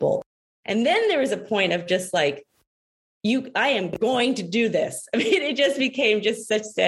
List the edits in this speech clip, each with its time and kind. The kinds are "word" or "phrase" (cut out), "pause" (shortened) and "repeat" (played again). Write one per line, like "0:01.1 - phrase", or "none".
none